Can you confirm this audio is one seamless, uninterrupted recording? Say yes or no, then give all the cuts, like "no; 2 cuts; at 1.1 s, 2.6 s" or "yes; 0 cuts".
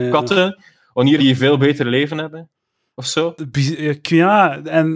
no; 1 cut; at 1.2 s